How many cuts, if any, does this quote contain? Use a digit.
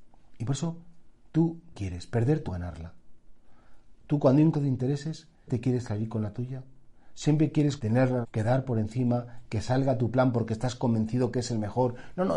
6